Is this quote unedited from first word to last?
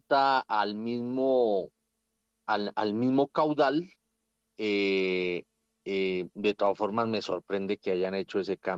yes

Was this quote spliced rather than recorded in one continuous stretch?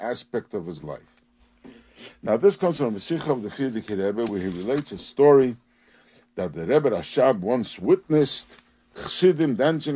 no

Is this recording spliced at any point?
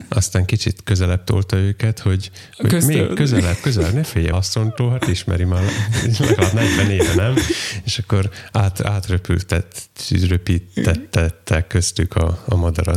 yes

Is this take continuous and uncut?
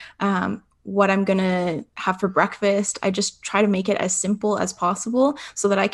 yes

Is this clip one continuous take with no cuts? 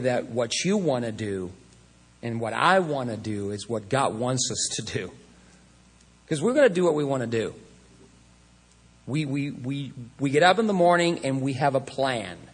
yes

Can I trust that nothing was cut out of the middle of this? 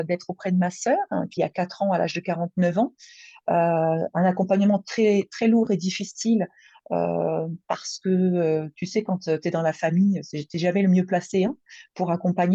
no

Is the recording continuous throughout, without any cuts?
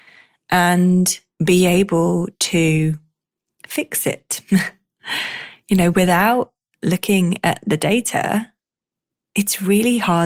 yes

